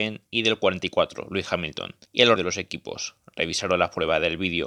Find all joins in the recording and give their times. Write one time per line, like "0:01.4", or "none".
0:02.1
0:02.4